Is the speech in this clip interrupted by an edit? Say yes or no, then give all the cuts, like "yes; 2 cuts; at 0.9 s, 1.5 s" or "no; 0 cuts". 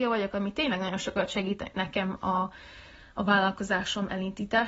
no; 0 cuts